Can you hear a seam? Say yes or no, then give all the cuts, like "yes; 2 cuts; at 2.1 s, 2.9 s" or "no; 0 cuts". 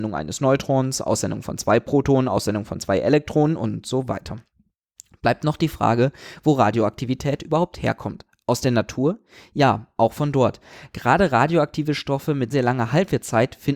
yes; 1 cut; at 12.5 s